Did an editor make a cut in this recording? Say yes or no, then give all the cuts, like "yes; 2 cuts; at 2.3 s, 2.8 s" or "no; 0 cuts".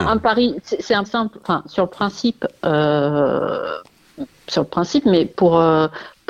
yes; 1 cut; at 1.0 s